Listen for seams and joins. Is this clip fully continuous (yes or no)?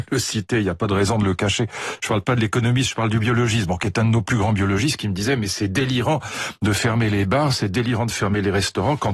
yes